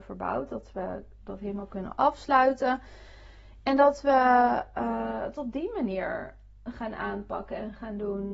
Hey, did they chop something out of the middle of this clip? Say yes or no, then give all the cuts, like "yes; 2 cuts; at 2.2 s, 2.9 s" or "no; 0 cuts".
no; 0 cuts